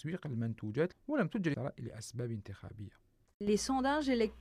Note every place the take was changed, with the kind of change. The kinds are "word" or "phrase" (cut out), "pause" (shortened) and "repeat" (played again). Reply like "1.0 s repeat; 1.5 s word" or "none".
0.9 s word; 1.5 s word

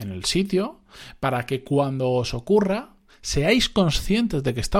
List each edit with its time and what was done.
none

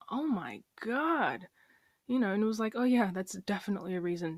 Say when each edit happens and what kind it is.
none

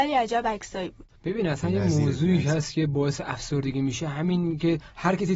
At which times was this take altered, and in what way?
1.1 s pause

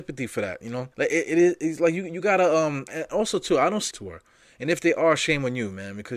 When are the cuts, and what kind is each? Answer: 0.9 s pause; 2.9 s word; 3.9 s phrase

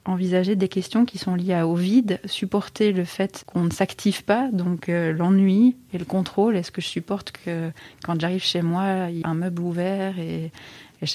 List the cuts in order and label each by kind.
9.2 s word

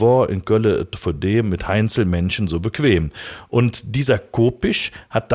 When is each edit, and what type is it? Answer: none

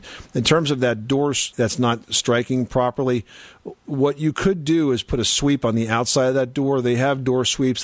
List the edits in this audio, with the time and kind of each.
1.5 s word

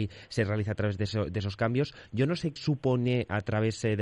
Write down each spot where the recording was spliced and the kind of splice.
2.6 s word

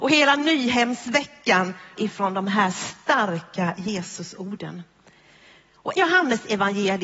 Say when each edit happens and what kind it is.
2.0 s word; 6.0 s word

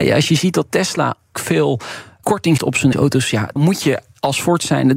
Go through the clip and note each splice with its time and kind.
1.3 s word; 2.6 s word; 2.9 s word; 3.6 s word

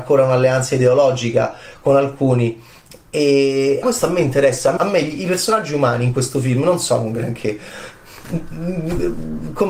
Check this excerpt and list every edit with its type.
3.8 s word; 4.8 s word

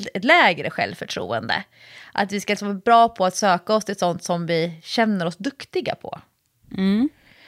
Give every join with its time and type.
none

